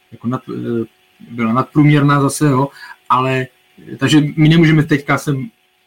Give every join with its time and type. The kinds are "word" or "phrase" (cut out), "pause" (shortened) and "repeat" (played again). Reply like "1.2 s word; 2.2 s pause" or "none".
none